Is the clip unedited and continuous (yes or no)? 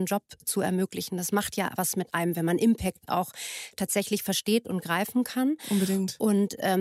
yes